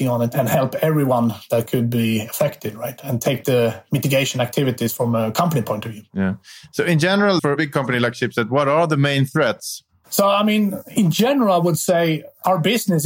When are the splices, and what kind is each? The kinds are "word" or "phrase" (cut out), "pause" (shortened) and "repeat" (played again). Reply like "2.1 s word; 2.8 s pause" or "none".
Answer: 7.4 s word